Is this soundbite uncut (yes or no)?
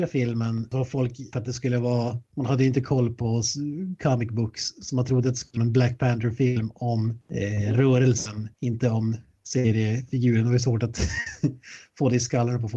no